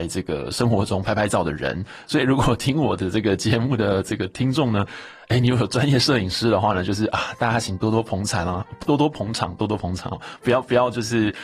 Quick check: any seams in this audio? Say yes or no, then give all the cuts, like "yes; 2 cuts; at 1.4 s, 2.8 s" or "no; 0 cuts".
no; 0 cuts